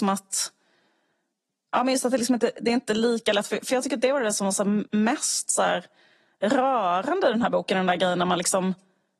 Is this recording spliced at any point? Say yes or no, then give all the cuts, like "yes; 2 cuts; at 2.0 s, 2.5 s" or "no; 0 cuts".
yes; 1 cut; at 4.9 s